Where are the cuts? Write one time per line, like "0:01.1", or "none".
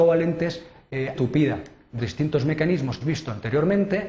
0:01.1
0:02.0
0:03.0